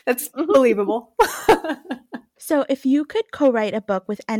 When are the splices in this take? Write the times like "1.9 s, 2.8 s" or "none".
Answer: none